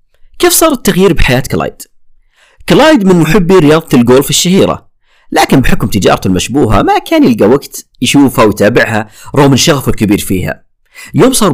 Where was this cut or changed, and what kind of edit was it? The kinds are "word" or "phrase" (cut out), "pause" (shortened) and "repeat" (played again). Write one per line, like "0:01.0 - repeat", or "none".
0:07.9 - pause